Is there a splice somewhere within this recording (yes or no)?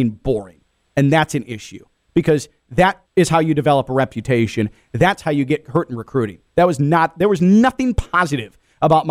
yes